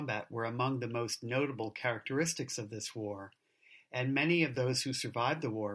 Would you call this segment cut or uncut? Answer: uncut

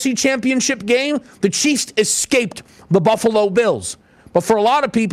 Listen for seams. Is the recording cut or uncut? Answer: uncut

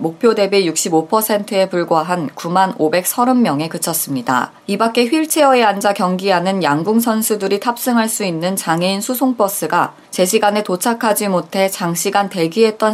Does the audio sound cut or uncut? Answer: cut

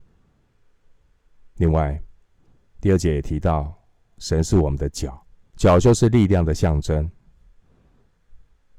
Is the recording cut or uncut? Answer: cut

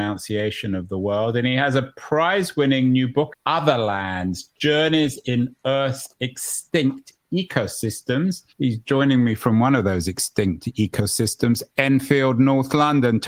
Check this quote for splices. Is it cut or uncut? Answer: cut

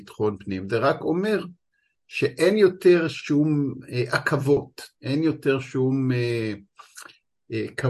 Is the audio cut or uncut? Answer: uncut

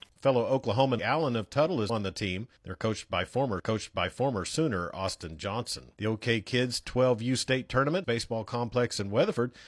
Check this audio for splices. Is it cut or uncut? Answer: cut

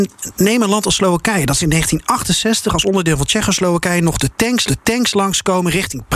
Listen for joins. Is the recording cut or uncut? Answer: cut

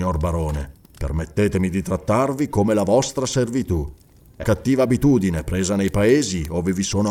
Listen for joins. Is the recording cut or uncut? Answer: cut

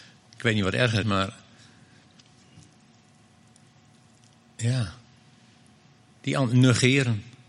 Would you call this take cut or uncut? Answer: cut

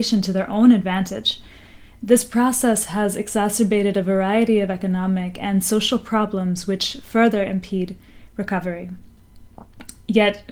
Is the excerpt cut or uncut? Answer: uncut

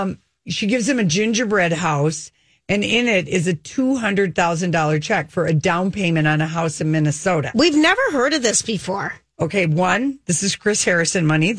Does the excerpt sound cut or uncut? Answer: uncut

